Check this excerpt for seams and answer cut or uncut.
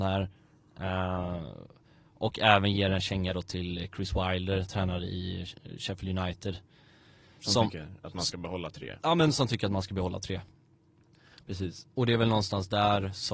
uncut